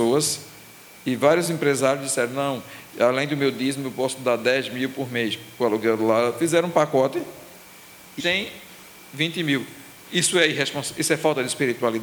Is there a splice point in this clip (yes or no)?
yes